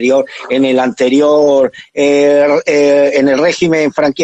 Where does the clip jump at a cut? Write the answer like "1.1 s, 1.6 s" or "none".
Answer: none